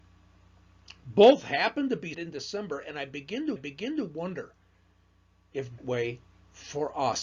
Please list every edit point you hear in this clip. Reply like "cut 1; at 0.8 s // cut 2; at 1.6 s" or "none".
cut 1; at 2.1 s // cut 2; at 3.6 s // cut 3; at 5.8 s